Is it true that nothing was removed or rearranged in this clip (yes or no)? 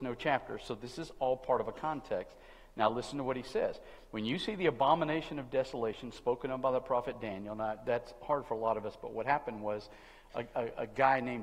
yes